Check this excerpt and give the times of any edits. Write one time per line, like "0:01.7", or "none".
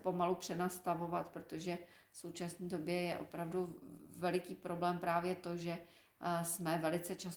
none